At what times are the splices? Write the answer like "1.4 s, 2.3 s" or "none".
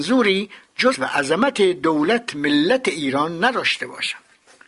0.9 s